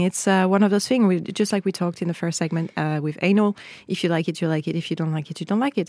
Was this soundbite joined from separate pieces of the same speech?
no; 0 cuts

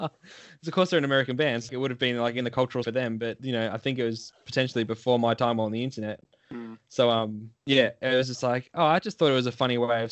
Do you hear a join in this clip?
yes; 4 cuts; at 1.7 s, 2.8 s, 3.4 s, 7.6 s

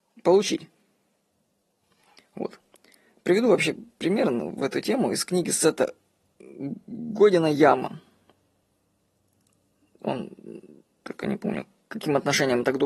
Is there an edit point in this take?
no; 0 cuts

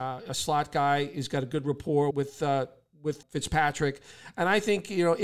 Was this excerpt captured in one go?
no; 2 cuts; at 2.1 s, 3.2 s

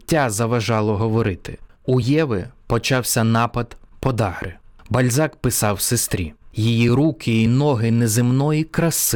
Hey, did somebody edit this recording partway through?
no; 0 cuts

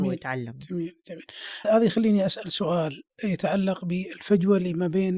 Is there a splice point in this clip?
yes; 1 cut; at 1.6 s

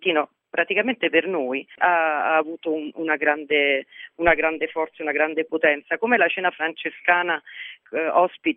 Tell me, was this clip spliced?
no; 0 cuts

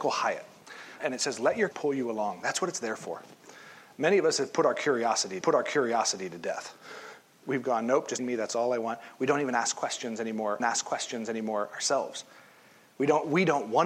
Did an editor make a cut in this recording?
yes; 5 cuts; at 1.0 s, 1.7 s, 5.4 s, 8.2 s, 10.6 s

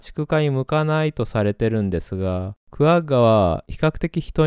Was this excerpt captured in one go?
no; 1 cut; at 2.6 s

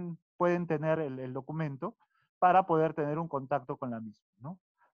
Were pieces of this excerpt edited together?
no; 0 cuts

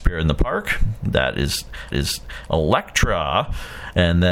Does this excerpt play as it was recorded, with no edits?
no; 1 cut; at 1.9 s

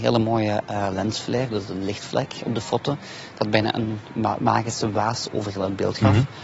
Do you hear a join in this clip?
no; 0 cuts

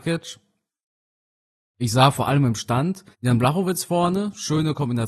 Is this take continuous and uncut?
no; 1 cut; at 3.1 s

